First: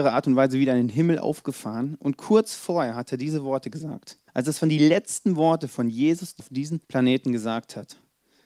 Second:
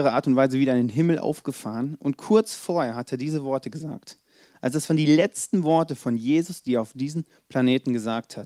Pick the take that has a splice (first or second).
first